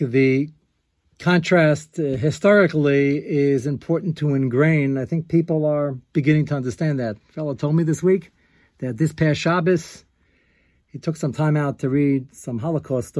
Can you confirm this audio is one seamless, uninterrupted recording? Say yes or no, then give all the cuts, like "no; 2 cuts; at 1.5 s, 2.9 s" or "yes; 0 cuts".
yes; 0 cuts